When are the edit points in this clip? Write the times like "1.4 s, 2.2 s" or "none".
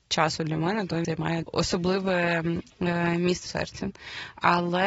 1.0 s, 1.4 s, 3.5 s